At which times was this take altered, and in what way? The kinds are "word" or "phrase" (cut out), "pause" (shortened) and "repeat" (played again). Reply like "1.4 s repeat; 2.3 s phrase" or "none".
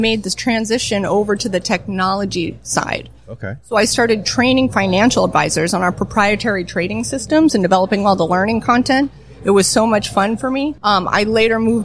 10.8 s pause